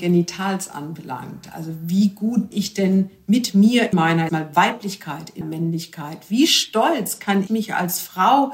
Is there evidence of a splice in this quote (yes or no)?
yes